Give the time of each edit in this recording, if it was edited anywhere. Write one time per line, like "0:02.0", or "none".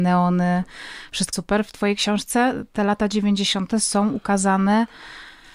0:01.3

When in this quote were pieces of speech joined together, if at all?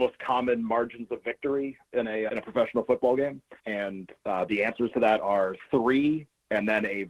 0:02.3
0:03.6

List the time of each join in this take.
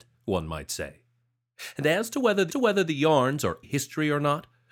0:02.5
0:03.6

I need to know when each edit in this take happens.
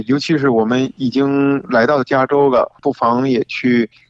0:02.8

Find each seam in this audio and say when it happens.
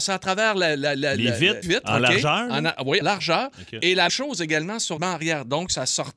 0:01.6
0:03.0
0:04.1
0:05.0

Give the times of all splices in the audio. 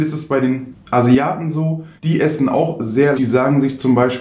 0:02.0
0:03.2

